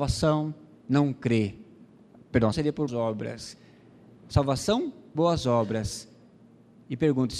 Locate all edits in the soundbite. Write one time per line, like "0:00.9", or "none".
0:02.5
0:02.9
0:05.1